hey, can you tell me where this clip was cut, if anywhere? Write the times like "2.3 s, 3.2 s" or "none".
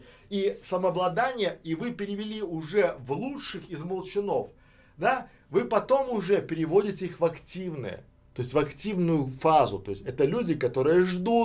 none